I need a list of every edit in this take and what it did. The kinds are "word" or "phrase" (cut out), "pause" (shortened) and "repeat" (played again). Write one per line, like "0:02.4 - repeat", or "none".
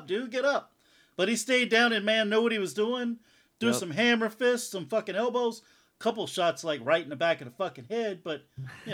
none